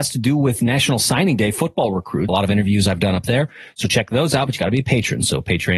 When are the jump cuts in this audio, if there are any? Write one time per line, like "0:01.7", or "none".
0:02.3

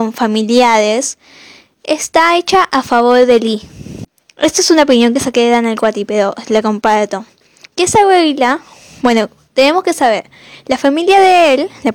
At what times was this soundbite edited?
none

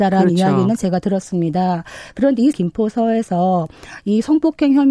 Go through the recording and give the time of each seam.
0:02.5

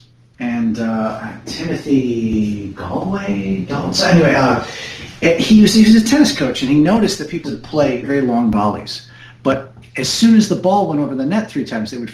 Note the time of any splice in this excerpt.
0:07.4
0:08.0

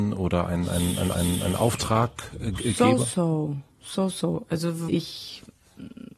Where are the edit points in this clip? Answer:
0:01.1
0:03.7
0:04.9

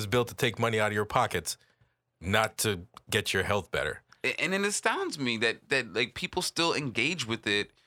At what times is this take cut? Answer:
none

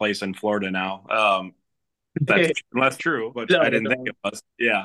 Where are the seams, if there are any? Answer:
0:02.3
0:03.0
0:03.3

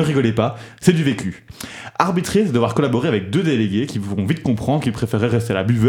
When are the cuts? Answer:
none

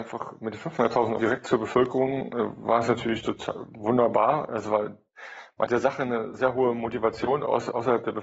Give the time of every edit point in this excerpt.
0:01.2
0:05.7

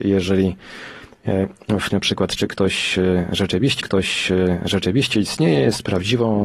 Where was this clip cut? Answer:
0:01.9
0:03.8

